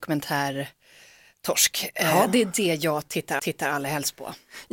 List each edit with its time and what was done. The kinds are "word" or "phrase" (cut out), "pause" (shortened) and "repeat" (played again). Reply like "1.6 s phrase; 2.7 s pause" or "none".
3.4 s repeat